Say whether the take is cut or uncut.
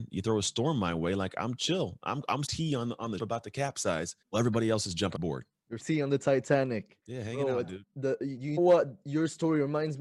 cut